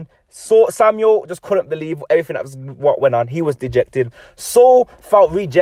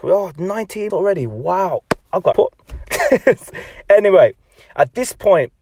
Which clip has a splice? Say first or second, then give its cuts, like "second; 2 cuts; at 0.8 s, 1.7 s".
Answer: second; 2 cuts; at 0.9 s, 2.3 s